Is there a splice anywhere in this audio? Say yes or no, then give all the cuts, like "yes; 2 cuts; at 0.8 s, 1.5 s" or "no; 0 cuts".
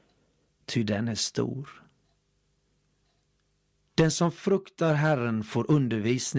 no; 0 cuts